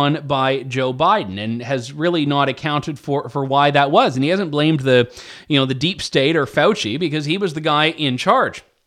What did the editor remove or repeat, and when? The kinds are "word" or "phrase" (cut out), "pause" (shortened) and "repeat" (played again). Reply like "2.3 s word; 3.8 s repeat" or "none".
none